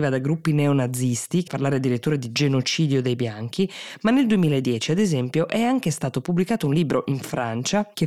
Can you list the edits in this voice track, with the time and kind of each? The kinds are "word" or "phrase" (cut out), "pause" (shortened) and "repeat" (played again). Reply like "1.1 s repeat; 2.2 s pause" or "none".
1.5 s phrase